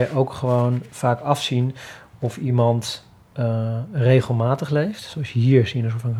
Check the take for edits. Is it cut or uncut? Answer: uncut